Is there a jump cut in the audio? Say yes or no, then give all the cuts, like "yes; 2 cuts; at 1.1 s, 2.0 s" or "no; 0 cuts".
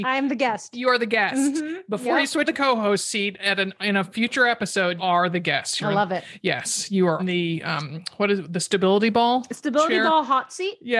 yes; 3 cuts; at 2.4 s, 5.0 s, 7.2 s